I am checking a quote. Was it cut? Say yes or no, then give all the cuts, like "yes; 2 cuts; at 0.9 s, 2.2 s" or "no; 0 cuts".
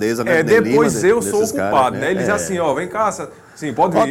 no; 0 cuts